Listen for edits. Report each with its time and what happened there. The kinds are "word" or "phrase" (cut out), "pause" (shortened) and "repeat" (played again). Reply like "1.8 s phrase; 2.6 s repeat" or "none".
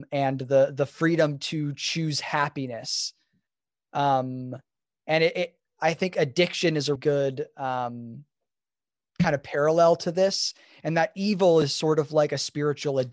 7.0 s word